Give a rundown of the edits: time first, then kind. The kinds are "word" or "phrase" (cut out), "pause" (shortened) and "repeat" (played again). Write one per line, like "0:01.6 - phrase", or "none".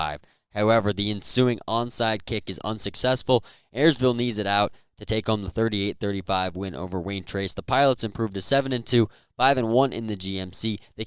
none